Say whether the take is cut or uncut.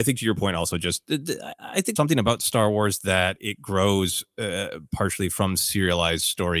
cut